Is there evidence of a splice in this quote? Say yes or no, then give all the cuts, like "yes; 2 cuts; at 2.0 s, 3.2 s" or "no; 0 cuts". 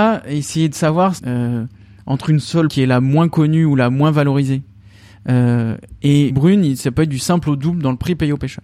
yes; 3 cuts; at 1.2 s, 2.7 s, 6.3 s